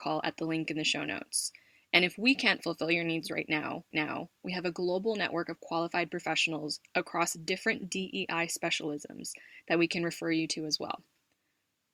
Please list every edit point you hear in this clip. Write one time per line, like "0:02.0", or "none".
0:03.9